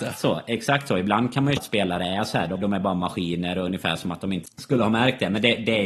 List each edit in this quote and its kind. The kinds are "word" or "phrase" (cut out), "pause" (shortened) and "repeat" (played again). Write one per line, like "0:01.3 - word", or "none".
0:01.6 - word
0:02.6 - word
0:04.5 - word